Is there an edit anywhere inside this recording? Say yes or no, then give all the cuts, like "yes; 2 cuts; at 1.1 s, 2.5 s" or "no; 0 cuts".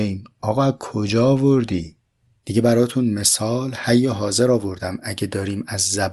no; 0 cuts